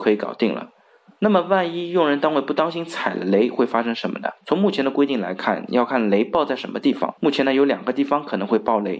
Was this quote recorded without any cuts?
no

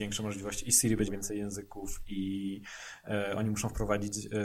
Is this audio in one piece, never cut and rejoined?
no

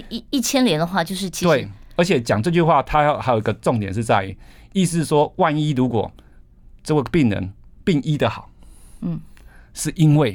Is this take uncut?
yes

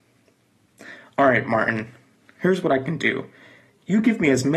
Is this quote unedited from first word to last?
yes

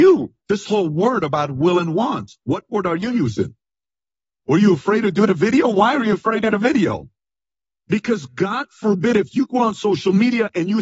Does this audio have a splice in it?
no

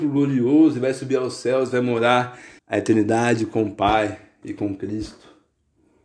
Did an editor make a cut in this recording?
yes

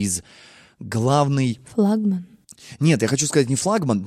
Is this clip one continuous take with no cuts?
no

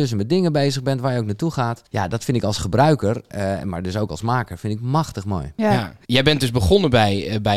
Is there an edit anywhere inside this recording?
yes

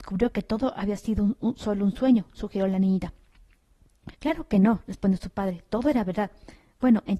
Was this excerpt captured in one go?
no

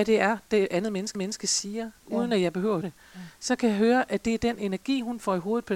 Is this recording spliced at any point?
yes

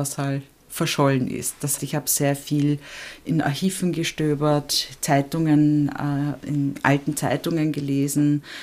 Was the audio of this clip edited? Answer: yes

